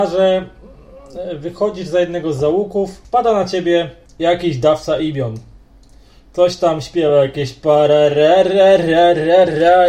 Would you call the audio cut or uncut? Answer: uncut